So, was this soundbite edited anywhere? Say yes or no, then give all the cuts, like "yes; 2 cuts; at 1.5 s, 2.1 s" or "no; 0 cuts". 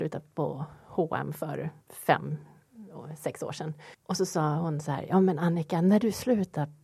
yes; 2 cuts; at 1.8 s, 3.9 s